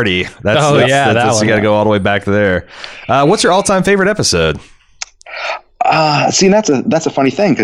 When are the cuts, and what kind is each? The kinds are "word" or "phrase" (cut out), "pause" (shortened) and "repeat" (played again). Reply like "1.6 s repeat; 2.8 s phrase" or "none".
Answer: none